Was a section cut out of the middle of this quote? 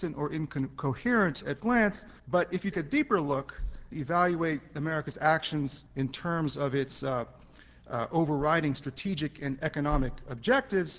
yes; 5 cuts; at 1.6 s, 2.2 s, 2.7 s, 3.9 s, 5.9 s

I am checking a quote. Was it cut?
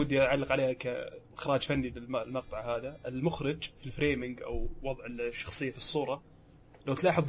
no; 0 cuts

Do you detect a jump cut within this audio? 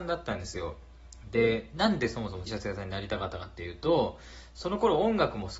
yes; 1 cut; at 2.5 s

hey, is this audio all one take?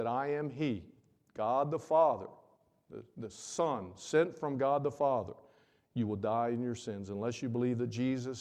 yes; 0 cuts

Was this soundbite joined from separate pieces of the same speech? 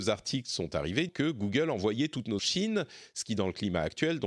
yes; 2 cuts; at 1.1 s, 2.4 s

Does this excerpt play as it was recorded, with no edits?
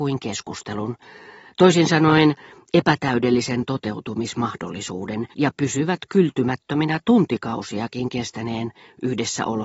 no; 1 cut; at 5.3 s

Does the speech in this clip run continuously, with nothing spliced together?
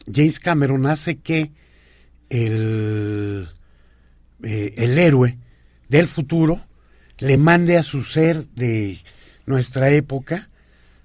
yes; 0 cuts

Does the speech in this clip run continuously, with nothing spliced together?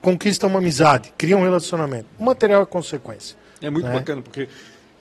yes; 0 cuts

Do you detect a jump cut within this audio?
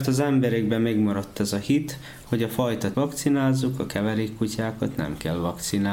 yes; 1 cut; at 2.9 s

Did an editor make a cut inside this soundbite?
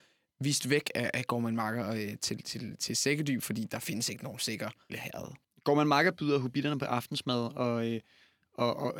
yes; 2 cuts; at 4.9 s, 5.4 s

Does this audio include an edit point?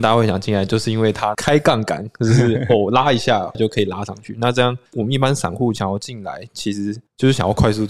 yes; 1 cut; at 4.9 s

